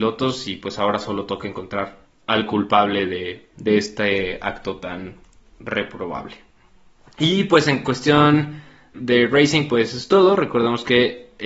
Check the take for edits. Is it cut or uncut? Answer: cut